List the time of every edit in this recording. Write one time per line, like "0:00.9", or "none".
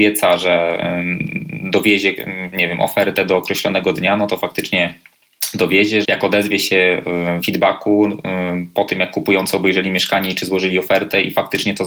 0:06.0
0:07.4